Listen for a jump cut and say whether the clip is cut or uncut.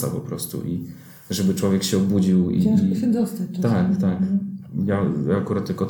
uncut